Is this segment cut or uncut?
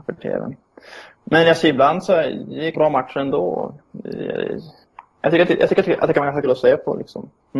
cut